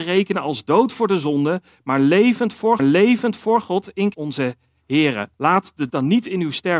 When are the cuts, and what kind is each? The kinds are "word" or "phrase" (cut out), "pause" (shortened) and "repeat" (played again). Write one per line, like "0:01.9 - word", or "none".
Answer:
0:02.8 - repeat
0:04.1 - phrase
0:05.3 - pause
0:05.9 - word

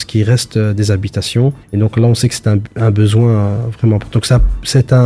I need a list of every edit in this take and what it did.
0:01.6 - pause

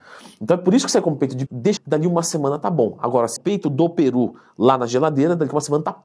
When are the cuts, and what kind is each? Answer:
0:01.5 - word
0:01.8 - phrase
0:03.4 - phrase

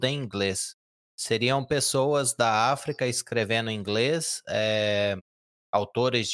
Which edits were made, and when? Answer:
none

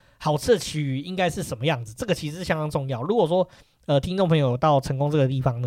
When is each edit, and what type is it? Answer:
none

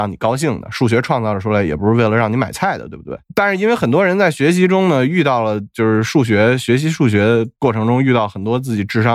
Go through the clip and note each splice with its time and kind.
0:03.2 - pause

